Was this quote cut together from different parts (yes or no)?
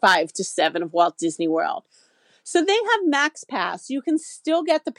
no